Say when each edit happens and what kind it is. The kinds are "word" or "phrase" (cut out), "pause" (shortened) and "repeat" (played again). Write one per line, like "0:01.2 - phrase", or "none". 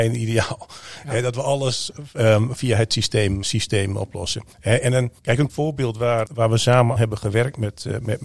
0:02.6 - word
0:03.4 - word
0:04.5 - pause
0:05.2 - pause
0:05.5 - word
0:06.3 - word
0:07.0 - word